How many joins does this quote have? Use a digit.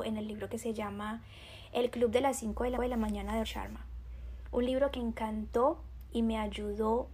3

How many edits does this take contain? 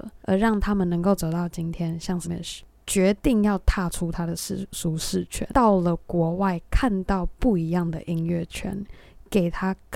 1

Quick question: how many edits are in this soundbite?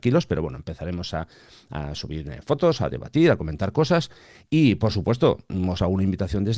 0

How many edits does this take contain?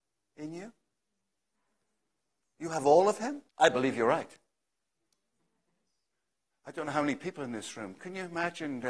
1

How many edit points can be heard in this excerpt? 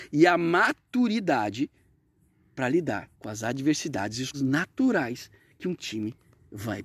2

